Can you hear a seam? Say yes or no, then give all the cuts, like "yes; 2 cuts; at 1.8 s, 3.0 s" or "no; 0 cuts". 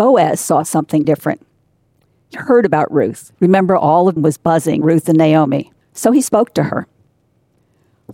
yes; 6 cuts; at 1.0 s, 2.3 s, 3.3 s, 4.2 s, 4.8 s, 5.8 s